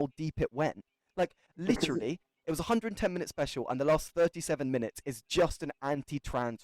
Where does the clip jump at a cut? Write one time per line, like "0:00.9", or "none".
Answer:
none

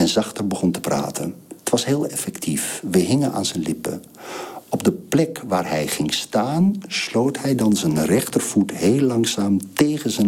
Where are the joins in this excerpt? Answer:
0:01.6

